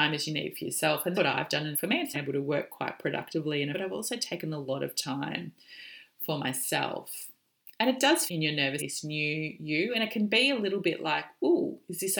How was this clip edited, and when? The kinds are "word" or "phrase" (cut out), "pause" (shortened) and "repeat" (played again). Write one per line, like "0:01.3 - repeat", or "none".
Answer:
0:01.1 - word
0:01.7 - phrase
0:02.1 - phrase
0:03.7 - phrase
0:08.3 - phrase
0:08.8 - phrase